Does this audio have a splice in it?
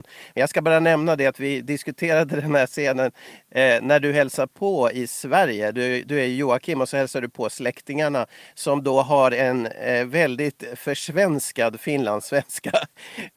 no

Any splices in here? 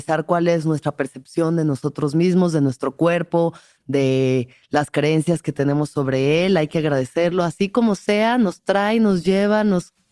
no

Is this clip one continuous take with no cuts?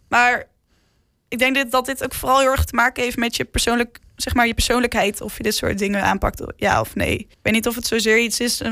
no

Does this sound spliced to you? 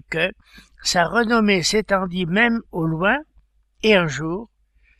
no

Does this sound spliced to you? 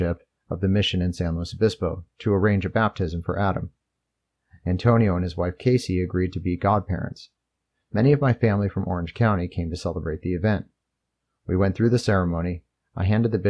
no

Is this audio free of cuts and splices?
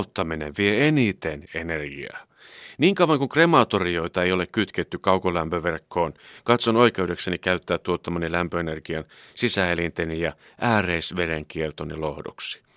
yes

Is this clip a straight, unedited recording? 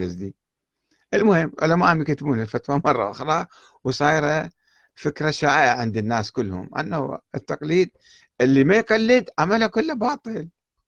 yes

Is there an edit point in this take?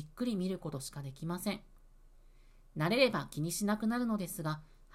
no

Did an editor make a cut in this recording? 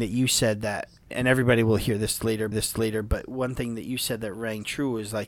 yes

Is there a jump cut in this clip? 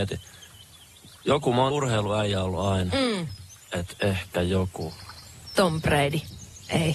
yes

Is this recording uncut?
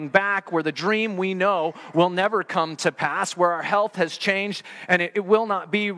yes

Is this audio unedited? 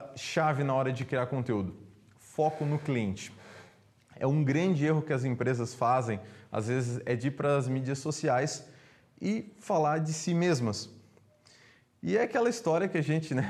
yes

